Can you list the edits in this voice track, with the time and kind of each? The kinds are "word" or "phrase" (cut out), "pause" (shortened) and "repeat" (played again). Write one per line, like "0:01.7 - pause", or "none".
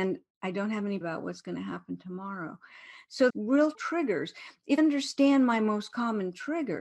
0:01.0 - word
0:03.3 - word
0:03.7 - word
0:04.8 - word